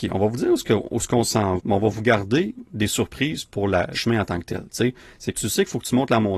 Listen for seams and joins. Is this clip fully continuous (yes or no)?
no